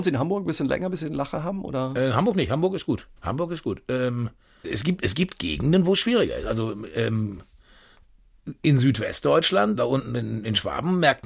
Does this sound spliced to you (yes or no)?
yes